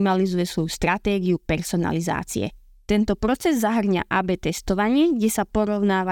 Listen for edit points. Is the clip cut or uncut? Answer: uncut